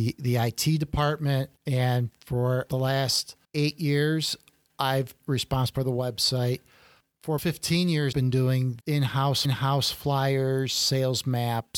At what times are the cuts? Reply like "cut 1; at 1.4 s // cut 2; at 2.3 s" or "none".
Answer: cut 1; at 1.6 s // cut 2; at 2.7 s // cut 3; at 3.4 s // cut 4; at 5.2 s // cut 5; at 5.7 s // cut 6; at 7.4 s // cut 7; at 8.1 s // cut 8; at 8.8 s // cut 9; at 9.4 s